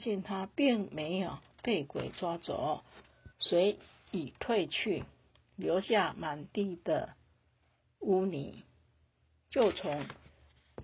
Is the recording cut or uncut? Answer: cut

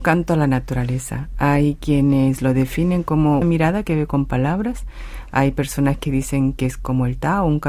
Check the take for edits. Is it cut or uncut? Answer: cut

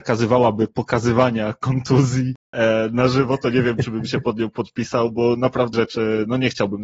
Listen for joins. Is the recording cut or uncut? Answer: cut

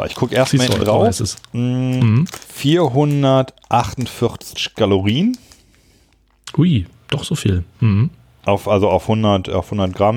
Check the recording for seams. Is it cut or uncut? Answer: cut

